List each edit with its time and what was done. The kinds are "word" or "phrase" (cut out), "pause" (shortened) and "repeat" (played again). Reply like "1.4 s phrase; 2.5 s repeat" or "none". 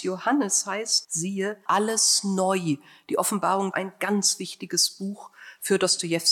1.0 s word; 1.7 s phrase; 3.7 s phrase